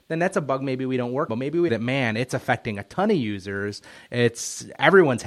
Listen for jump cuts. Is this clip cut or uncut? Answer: cut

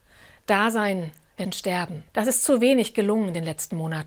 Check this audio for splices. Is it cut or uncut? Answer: cut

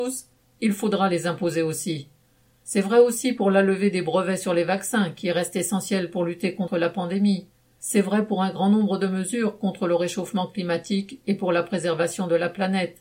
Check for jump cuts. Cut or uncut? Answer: uncut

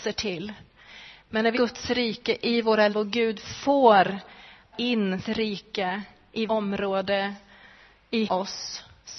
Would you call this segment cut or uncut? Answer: cut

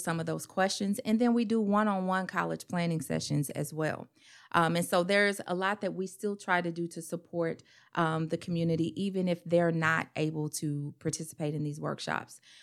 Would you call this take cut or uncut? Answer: uncut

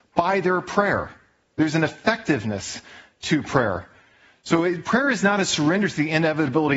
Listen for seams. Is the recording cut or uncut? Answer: uncut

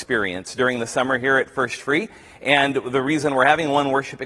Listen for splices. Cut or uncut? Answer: uncut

